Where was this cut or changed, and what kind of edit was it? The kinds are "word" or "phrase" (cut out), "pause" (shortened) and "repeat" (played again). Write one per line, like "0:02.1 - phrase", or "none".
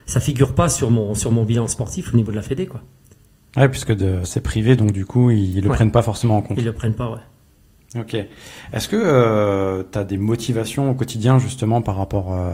none